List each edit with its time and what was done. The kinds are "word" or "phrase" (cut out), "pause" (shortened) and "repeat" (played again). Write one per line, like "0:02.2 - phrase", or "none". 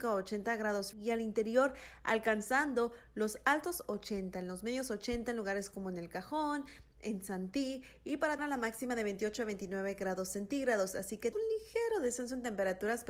0:00.9 - word
0:08.4 - word
0:11.3 - word